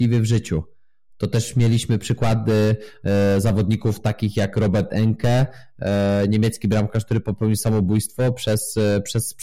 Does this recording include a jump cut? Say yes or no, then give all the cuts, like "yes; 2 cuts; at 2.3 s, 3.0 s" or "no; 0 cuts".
no; 0 cuts